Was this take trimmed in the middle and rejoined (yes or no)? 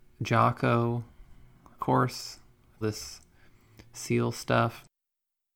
yes